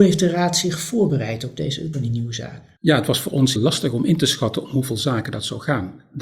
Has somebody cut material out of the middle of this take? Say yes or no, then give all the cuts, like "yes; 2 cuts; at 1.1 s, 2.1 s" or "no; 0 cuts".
yes; 3 cuts; at 1.9 s, 2.8 s, 3.6 s